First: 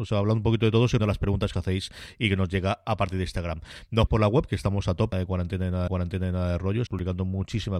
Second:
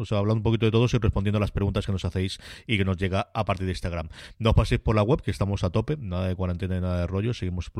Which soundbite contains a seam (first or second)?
first